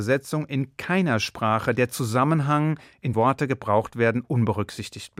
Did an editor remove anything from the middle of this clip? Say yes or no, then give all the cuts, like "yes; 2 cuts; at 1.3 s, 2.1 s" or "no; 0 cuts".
yes; 1 cut; at 3.1 s